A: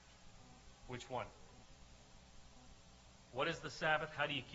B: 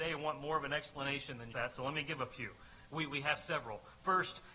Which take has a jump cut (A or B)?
B